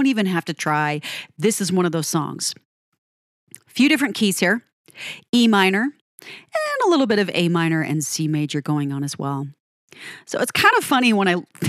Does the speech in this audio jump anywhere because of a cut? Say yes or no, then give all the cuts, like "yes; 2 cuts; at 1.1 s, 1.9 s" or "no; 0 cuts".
no; 0 cuts